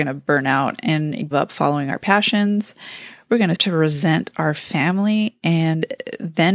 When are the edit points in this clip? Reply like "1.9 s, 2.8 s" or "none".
1.3 s, 3.5 s